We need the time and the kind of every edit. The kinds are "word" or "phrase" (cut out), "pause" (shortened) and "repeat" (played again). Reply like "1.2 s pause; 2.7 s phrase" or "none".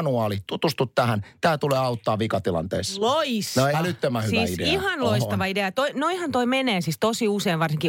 3.7 s word

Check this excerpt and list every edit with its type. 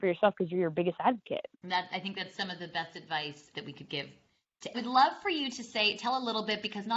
1.5 s pause; 3.5 s word; 4.7 s phrase

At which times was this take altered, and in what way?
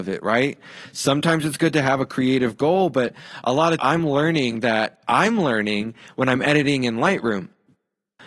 3.8 s word

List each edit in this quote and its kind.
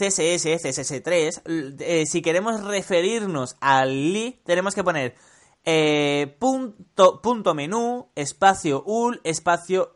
none

